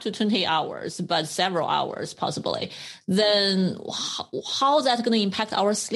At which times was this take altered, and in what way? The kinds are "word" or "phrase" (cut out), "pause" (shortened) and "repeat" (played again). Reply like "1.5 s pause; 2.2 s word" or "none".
none